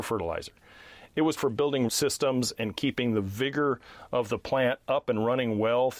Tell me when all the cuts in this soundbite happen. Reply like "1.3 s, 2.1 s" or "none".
1.4 s, 1.9 s